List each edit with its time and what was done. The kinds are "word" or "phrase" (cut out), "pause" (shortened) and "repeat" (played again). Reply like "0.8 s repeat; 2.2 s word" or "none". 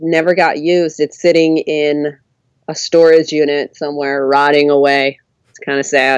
1.2 s word